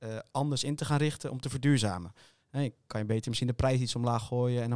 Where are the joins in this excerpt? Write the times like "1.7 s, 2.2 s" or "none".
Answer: none